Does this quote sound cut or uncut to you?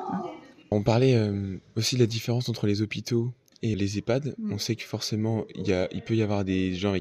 uncut